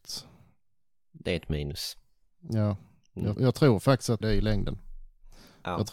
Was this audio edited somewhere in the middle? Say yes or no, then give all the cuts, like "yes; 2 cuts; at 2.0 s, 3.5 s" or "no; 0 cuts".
yes; 2 cuts; at 3.4 s, 4.2 s